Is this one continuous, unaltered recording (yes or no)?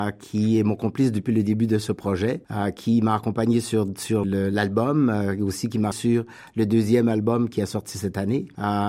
no